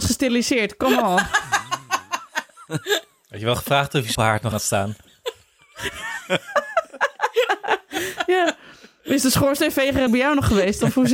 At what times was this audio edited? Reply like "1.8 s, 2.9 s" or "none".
4.1 s, 4.5 s, 10.1 s